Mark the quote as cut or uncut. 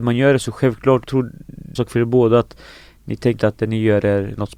cut